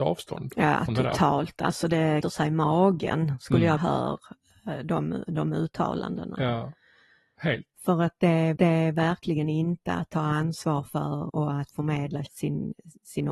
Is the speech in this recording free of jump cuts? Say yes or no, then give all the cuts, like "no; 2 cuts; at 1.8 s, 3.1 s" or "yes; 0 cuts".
no; 6 cuts; at 2.2 s, 3.8 s, 7.7 s, 8.6 s, 11.3 s, 12.3 s